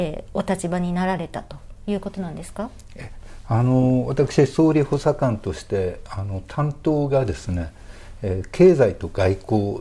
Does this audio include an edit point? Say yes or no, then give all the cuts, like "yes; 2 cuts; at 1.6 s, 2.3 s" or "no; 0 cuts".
no; 0 cuts